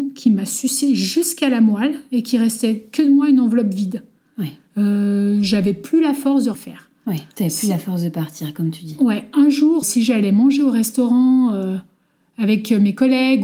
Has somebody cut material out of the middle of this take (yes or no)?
yes